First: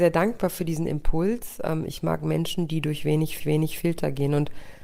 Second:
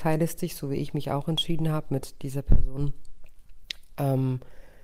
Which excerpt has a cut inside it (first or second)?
first